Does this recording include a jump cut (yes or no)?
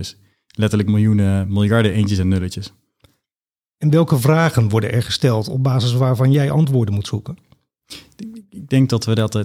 no